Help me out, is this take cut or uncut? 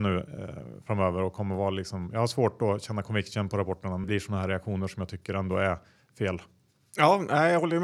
cut